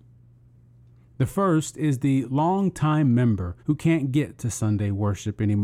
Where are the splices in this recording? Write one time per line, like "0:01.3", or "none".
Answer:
0:03.6